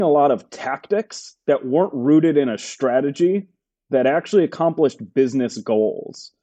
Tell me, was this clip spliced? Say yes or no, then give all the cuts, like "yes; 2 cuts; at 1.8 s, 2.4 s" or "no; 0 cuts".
no; 0 cuts